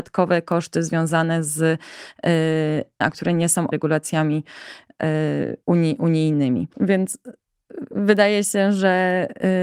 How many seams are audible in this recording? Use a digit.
4